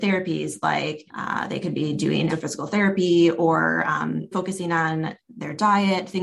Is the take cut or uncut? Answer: cut